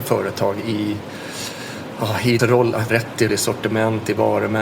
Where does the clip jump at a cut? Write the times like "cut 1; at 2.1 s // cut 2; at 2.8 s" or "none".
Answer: cut 1; at 2.4 s // cut 2; at 2.9 s // cut 3; at 3.3 s